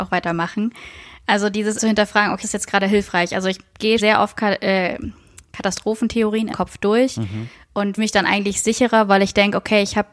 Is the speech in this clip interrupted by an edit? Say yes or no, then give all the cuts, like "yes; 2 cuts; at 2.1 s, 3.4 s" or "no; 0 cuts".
yes; 5 cuts; at 1.8 s, 2.4 s, 4.0 s, 6.5 s, 8.0 s